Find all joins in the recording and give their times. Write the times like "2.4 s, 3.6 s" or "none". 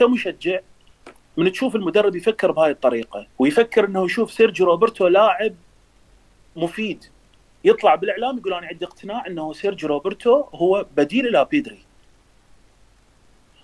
3.3 s, 7.3 s